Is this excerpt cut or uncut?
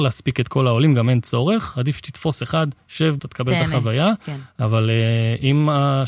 cut